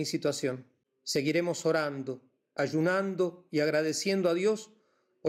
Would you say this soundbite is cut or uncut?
uncut